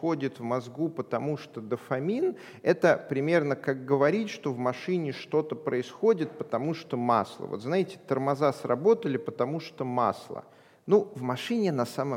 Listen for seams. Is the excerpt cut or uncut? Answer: uncut